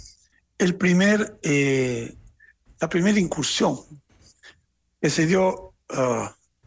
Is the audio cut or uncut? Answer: uncut